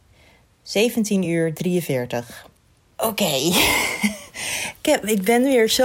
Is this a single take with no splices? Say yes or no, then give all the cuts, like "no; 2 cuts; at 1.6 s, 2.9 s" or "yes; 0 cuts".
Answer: yes; 0 cuts